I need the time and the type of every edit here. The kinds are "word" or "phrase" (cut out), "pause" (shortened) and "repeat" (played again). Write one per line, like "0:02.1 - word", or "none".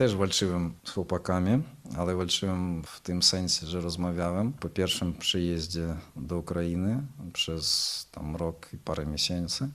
none